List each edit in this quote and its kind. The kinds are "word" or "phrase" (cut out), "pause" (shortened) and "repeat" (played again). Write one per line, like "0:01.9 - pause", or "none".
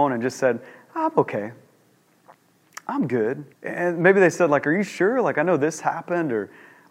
0:03.5 - pause